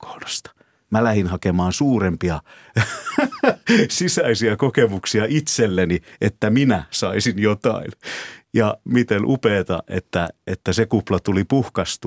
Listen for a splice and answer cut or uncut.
uncut